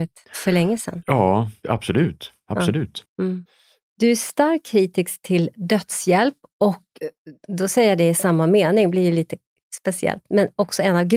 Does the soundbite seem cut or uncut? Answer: uncut